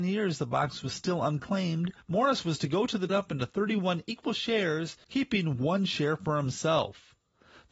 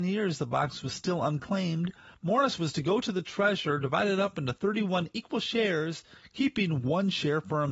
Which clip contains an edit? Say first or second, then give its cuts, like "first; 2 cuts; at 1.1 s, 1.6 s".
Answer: first; 3 cuts; at 2.0 s, 3.1 s, 5.0 s